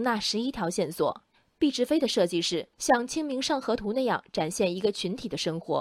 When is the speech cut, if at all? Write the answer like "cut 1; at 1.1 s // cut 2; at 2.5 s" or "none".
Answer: cut 1; at 2.7 s